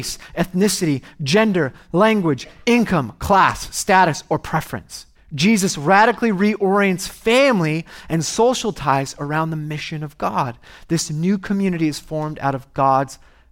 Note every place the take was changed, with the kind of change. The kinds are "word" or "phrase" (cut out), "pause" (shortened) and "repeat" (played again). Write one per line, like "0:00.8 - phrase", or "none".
0:05.1 - pause

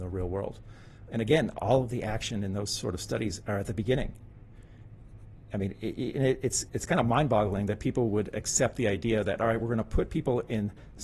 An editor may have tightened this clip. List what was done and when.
0:01.1 - word
0:06.7 - word

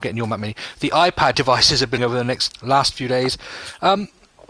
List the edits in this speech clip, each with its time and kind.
0:01.3 - word
0:02.0 - word
0:02.5 - word

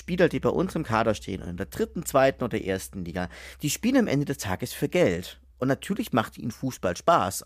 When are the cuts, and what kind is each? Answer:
0:05.5 - pause

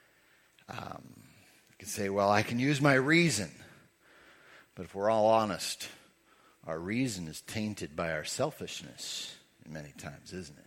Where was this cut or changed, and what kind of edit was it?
none

